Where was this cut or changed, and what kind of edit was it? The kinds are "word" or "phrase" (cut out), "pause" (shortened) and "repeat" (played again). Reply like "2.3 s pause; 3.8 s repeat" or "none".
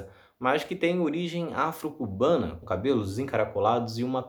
2.6 s word